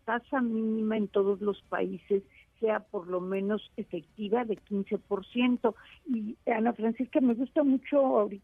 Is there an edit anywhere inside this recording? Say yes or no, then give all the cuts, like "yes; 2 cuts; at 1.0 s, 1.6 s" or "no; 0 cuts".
no; 0 cuts